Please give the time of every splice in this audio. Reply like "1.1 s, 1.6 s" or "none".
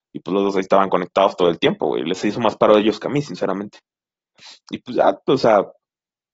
4.6 s

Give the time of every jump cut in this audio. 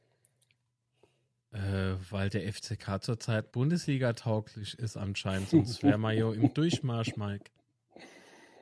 3.5 s

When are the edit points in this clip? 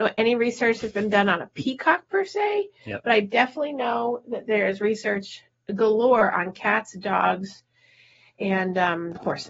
none

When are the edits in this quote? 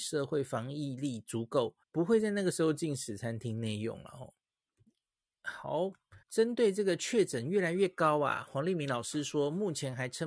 1.8 s, 4.4 s, 6.2 s

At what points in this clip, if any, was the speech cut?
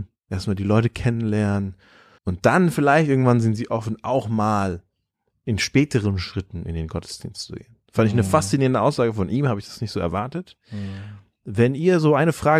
2.2 s

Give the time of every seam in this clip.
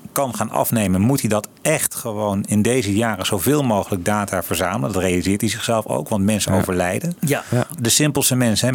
none

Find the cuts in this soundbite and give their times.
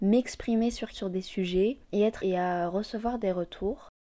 0.9 s, 1.8 s, 2.2 s

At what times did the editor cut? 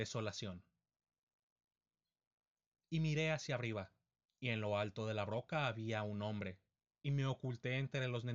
none

